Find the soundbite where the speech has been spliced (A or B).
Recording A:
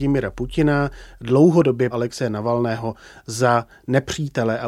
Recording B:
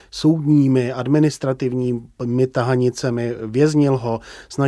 A